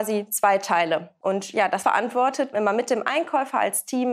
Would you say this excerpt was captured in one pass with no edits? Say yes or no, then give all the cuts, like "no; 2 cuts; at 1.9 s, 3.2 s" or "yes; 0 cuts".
no; 1 cut; at 2.5 s